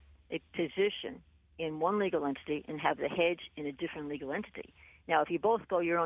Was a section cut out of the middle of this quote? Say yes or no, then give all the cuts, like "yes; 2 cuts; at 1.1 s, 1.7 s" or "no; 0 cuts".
no; 0 cuts